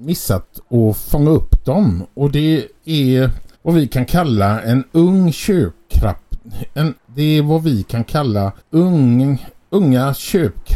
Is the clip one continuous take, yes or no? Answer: no